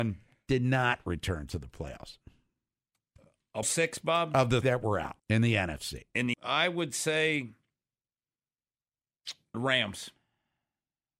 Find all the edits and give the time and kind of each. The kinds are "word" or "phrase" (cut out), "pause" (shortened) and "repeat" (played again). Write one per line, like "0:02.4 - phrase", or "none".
0:03.6 - word
0:04.6 - word
0:05.2 - pause
0:06.3 - word
0:09.5 - word